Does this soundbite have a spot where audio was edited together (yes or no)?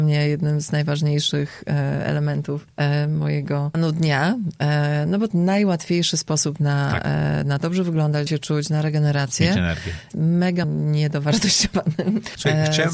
yes